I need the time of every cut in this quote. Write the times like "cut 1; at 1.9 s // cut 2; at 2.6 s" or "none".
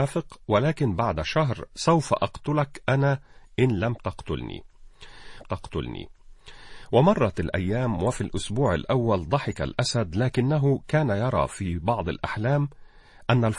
cut 1; at 5.4 s